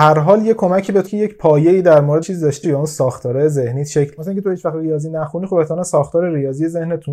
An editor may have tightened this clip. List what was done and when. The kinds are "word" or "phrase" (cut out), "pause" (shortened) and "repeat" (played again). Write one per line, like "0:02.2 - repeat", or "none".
0:01.1 - word
0:02.2 - word
0:02.6 - word
0:04.2 - word